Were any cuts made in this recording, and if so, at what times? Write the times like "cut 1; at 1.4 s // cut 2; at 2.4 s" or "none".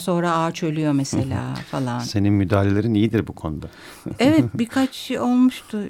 none